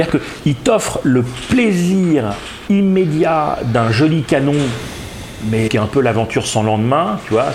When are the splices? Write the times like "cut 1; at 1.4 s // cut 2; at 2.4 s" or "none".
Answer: cut 1; at 2.7 s // cut 2; at 5.7 s